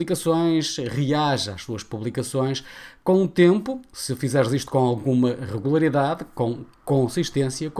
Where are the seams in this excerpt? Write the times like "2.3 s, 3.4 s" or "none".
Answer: none